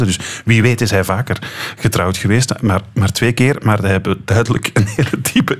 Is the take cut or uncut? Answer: uncut